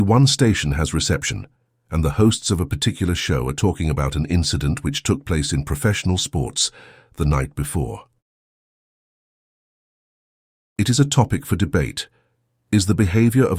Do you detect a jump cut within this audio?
no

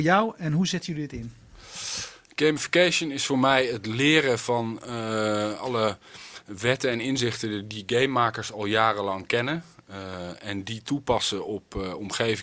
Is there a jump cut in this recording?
no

